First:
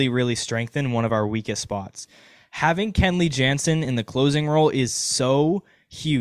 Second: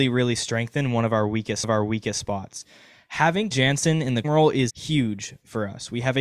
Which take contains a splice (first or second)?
second